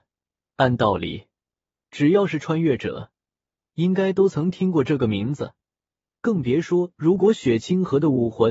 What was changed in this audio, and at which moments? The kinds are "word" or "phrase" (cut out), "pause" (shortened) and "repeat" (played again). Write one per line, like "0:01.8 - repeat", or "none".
none